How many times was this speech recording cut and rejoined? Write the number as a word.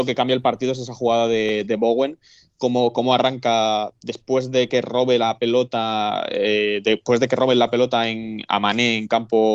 zero